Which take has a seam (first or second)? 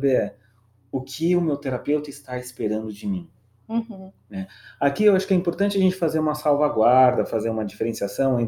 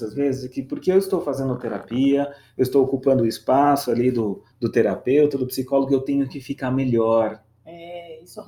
second